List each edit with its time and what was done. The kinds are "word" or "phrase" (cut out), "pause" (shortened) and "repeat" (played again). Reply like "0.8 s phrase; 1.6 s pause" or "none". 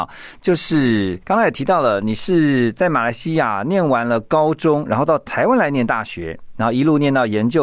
1.2 s pause